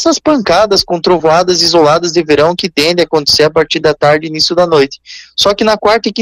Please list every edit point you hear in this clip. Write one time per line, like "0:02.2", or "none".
none